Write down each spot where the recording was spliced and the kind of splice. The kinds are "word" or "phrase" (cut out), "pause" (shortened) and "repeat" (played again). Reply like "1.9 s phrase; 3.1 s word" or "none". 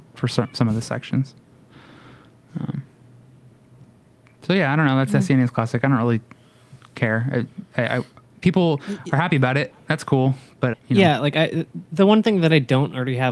10.7 s word